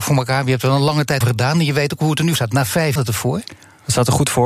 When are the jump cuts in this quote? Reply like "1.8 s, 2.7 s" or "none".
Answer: 1.2 s, 2.4 s, 3.0 s